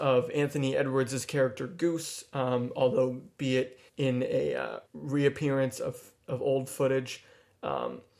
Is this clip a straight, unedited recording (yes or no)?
no